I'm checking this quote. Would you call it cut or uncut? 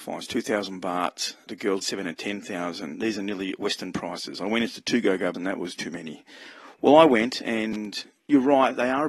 cut